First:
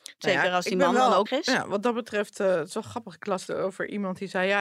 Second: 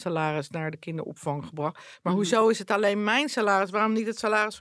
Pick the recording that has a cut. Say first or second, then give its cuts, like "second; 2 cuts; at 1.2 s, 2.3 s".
first; 2 cuts; at 1.3 s, 3.5 s